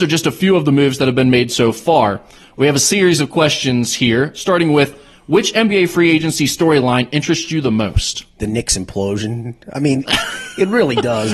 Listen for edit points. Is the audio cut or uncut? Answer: uncut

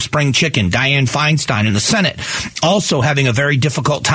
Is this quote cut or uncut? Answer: uncut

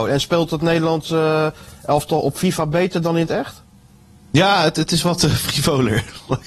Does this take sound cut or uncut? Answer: uncut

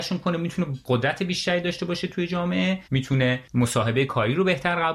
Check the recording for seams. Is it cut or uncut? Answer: cut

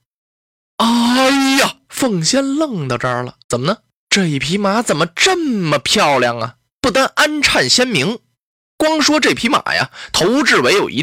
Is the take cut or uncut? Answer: cut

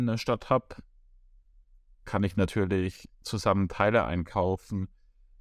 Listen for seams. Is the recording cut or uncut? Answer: cut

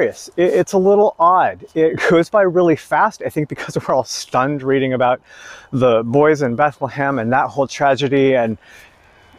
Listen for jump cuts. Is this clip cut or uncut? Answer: uncut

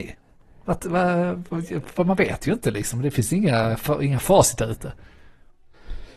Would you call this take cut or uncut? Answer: uncut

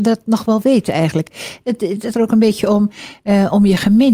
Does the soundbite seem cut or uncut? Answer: cut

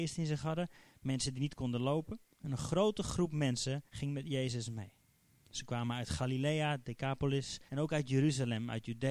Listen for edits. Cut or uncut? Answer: cut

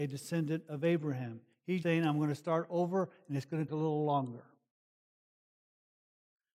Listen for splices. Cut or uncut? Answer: cut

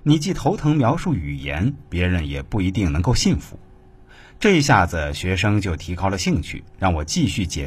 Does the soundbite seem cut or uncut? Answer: uncut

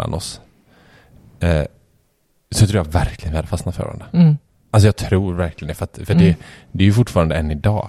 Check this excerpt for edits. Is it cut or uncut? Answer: uncut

